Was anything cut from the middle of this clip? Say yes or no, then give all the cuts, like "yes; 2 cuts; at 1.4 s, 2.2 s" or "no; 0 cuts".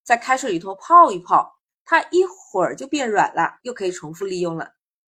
yes; 1 cut; at 3.6 s